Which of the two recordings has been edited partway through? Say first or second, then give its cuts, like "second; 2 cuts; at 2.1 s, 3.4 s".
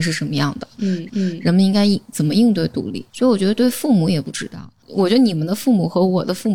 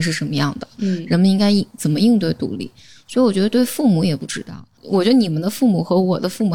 first; 2 cuts; at 1.1 s, 3.1 s